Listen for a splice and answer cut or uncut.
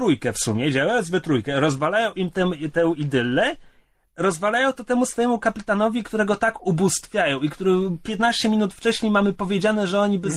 uncut